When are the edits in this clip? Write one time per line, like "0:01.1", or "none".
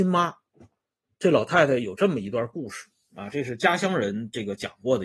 none